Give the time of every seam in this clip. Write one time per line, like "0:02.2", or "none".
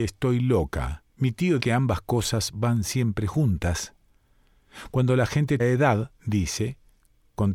0:01.1
0:01.6
0:05.6